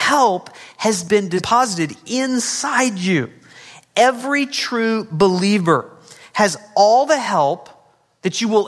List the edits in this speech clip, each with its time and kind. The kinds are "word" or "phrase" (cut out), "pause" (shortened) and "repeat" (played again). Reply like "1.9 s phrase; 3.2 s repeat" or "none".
none

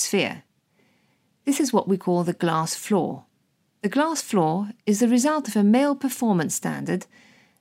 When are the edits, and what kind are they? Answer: 3.7 s pause; 4.8 s pause

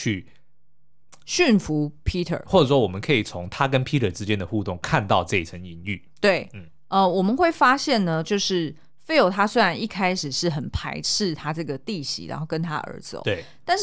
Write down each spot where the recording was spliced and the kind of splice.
none

